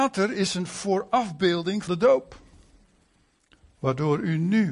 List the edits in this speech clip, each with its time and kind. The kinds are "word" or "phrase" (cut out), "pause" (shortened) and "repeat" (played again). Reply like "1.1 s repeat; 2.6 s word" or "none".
1.9 s phrase